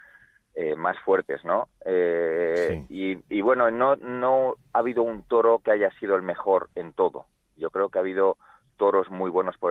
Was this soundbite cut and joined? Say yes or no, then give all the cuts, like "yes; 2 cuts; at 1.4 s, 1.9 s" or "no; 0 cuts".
no; 0 cuts